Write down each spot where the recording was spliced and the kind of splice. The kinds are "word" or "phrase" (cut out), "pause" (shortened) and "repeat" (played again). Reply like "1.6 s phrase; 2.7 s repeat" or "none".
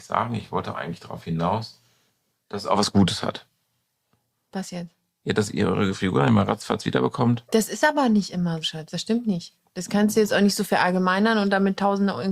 8.6 s word